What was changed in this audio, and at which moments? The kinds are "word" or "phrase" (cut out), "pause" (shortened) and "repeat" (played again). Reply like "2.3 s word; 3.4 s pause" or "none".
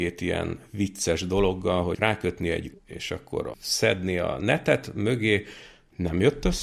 1.9 s word; 2.7 s phrase; 3.5 s phrase

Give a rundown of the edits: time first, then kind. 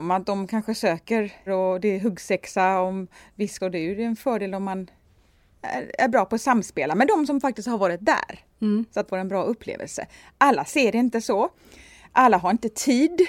1.5 s word; 3.6 s word; 9.1 s word

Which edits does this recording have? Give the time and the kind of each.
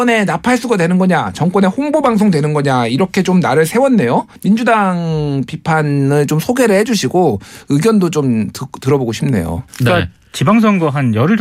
4.4 s pause; 9.7 s pause

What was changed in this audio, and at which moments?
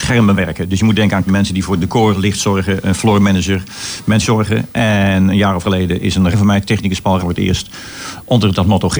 1.3 s word; 4.2 s phrase; 5.6 s word; 6.3 s word; 7.2 s word

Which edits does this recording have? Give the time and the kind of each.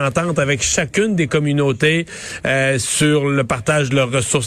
none

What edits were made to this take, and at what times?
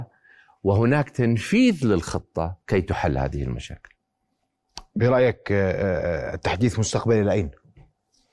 2.6 s pause

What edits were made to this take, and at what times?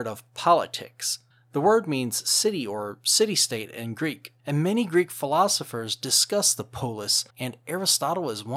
1.3 s pause; 4.4 s pause; 7.3 s pause

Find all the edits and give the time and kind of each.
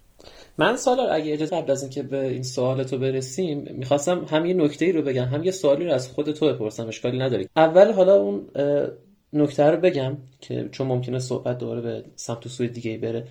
1.5 s word; 7.5 s word

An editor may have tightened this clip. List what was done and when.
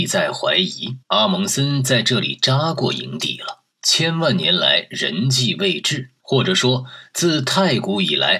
1.0 s pause; 3.7 s pause; 6.2 s pause

